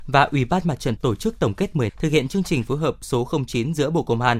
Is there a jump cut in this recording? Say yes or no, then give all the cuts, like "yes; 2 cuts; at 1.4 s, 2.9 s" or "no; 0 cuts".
yes; 2 cuts; at 1.0 s, 1.9 s